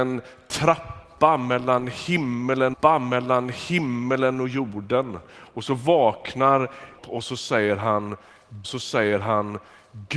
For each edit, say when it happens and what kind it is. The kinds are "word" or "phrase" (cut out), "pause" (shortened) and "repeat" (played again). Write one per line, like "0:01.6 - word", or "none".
0:02.7 - repeat
0:07.0 - word
0:08.6 - repeat